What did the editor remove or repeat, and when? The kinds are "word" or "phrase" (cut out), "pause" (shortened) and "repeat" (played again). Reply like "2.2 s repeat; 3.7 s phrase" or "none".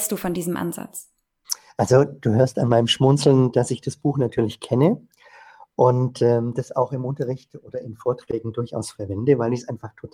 none